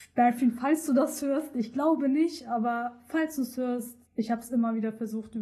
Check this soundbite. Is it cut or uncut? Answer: cut